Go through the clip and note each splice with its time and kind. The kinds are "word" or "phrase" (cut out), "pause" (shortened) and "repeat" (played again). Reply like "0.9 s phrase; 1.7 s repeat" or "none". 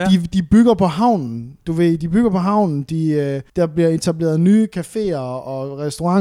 3.5 s pause